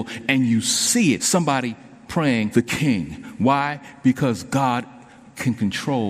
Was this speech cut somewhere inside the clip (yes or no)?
yes